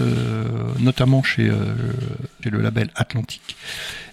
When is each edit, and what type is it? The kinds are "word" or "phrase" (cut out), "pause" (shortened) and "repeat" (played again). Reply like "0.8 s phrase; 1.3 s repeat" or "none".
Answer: 2.4 s word